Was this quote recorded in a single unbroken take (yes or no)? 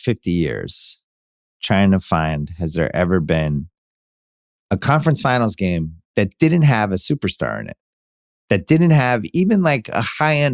yes